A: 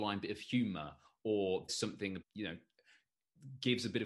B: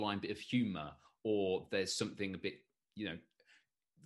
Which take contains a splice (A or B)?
A